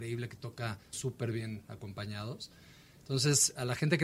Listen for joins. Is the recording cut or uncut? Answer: cut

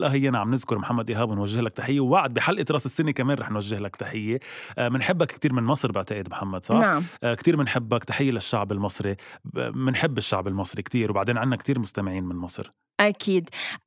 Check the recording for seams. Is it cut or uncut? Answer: uncut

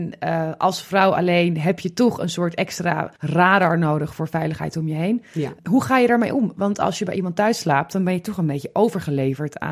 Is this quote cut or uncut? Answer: cut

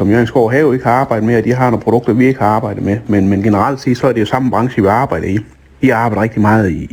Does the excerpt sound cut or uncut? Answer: uncut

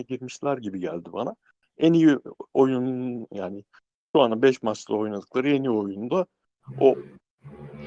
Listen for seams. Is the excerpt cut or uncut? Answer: uncut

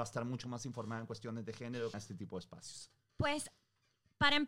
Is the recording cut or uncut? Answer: cut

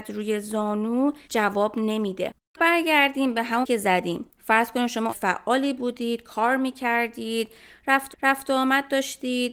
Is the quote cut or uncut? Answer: cut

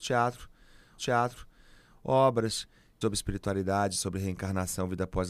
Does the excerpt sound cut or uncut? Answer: cut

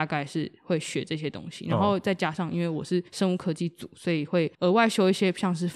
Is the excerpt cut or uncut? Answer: cut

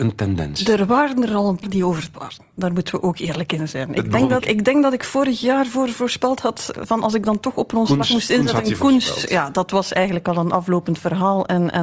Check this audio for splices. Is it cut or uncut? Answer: cut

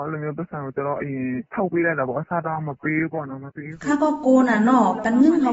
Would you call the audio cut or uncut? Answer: cut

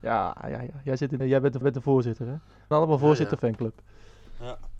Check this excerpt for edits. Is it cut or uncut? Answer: cut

